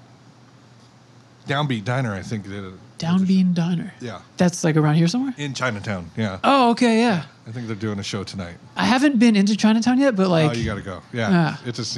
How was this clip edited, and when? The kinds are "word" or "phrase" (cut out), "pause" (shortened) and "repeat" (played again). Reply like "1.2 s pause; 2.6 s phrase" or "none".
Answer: 4.3 s pause